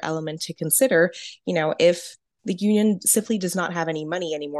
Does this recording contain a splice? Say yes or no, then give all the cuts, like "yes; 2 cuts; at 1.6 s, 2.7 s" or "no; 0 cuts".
no; 0 cuts